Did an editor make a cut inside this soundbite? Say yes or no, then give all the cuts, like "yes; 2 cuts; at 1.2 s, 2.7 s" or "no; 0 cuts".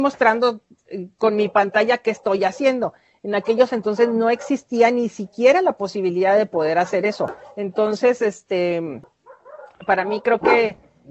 no; 0 cuts